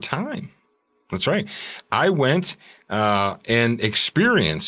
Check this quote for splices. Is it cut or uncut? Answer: uncut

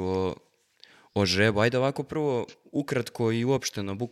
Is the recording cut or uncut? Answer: uncut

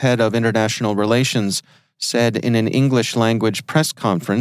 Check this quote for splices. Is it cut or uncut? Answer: uncut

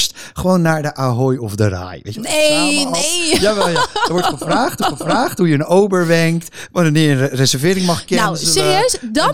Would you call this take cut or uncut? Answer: cut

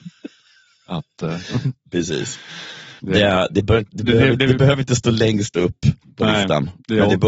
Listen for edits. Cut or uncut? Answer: uncut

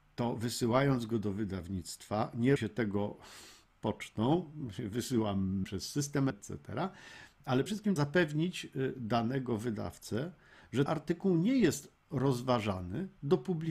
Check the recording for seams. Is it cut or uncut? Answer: cut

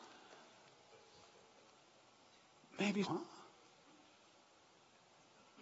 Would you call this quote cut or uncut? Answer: cut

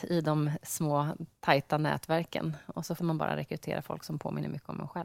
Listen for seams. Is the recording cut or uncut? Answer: cut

